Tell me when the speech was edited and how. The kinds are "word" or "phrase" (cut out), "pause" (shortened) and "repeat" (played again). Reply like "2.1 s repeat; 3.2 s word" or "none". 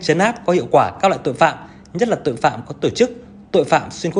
none